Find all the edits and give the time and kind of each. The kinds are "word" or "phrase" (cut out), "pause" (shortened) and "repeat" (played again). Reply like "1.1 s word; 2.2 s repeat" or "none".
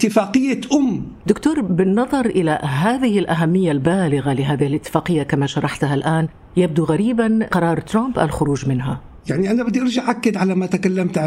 1.2 s word